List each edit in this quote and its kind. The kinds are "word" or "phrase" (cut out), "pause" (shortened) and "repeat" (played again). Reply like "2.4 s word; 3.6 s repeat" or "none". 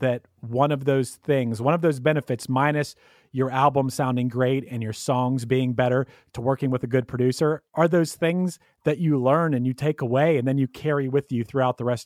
none